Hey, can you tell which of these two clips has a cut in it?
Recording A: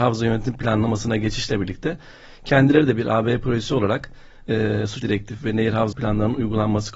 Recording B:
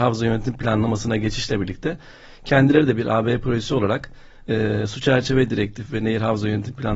A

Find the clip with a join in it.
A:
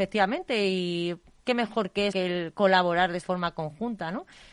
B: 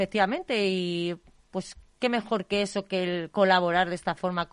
A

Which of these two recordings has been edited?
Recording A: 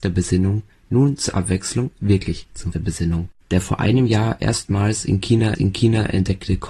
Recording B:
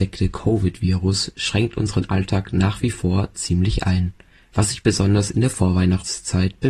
A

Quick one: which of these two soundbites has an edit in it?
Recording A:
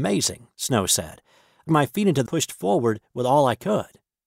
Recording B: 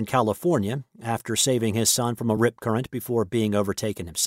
A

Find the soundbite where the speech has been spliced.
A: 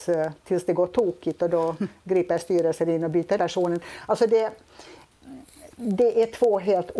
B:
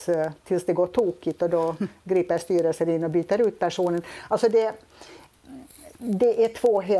A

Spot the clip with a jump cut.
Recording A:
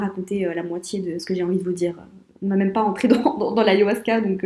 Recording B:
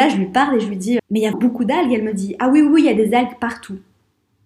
B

